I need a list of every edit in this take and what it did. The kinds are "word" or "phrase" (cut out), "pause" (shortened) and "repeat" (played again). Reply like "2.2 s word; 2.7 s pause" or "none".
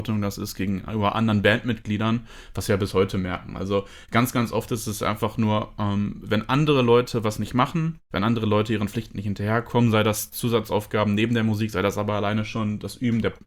8.0 s pause